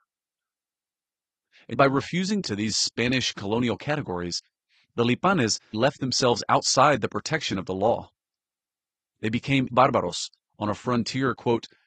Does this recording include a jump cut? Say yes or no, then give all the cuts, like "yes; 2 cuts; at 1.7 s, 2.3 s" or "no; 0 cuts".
yes; 4 cuts; at 1.7 s, 2.4 s, 5.7 s, 9.7 s